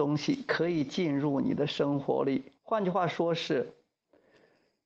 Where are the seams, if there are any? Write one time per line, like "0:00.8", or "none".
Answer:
0:02.6